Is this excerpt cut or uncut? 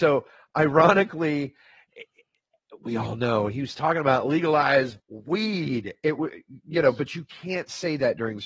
cut